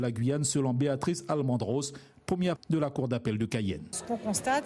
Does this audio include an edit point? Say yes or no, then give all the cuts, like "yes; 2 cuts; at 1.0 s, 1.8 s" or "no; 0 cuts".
yes; 1 cut; at 2.6 s